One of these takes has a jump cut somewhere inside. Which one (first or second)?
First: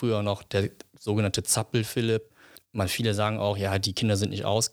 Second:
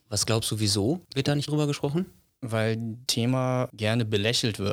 second